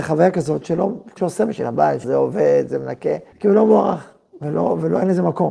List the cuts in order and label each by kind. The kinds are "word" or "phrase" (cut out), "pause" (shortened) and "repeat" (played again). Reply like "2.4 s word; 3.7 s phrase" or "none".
1.2 s word; 2.0 s word; 3.3 s pause